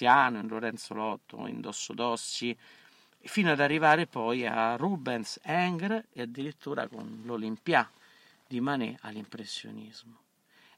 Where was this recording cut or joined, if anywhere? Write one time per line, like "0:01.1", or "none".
none